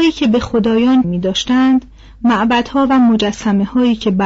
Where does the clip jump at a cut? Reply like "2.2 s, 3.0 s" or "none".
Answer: 1.0 s